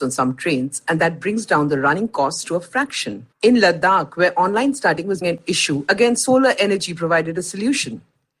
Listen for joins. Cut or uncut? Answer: cut